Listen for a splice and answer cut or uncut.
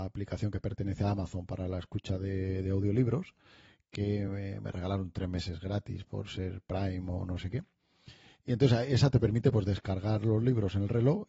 uncut